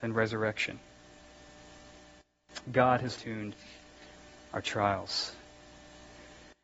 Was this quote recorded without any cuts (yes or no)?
no